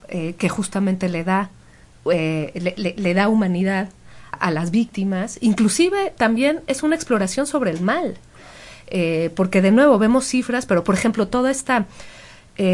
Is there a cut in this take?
yes; 2 cuts; at 2.5 s, 4.3 s

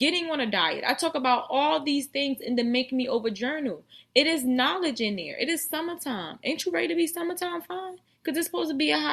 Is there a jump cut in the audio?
no; 0 cuts

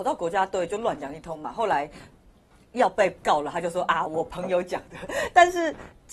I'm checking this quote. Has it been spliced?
no; 0 cuts

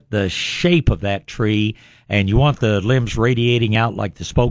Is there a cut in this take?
no; 0 cuts

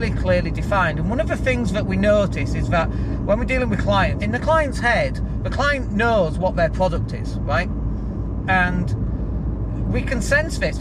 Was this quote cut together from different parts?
yes; 1 cut; at 4.2 s

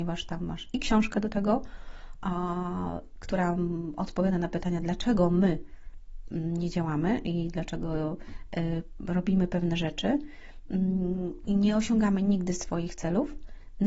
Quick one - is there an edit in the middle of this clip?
no; 0 cuts

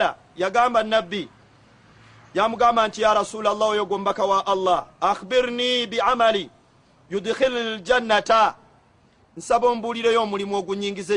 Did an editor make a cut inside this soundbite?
no; 0 cuts

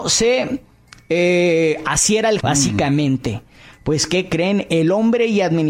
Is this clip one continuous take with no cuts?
no; 1 cut; at 2.4 s

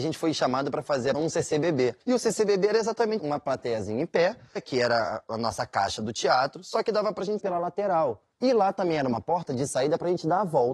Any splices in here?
yes; 6 cuts; at 1.1 s, 2.0 s, 3.2 s, 4.6 s, 7.4 s, 8.3 s

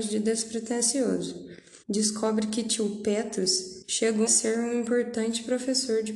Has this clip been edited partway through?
yes; 2 cuts; at 1.8 s, 4.3 s

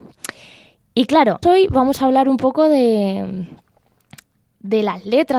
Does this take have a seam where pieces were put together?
yes; 1 cut; at 1.4 s

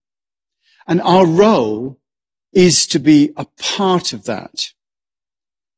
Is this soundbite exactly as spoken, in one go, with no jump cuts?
yes; 0 cuts

